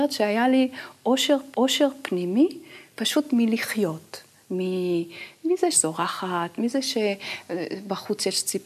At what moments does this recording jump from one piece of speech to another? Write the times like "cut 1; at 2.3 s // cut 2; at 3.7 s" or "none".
cut 1; at 1.5 s // cut 2; at 5.7 s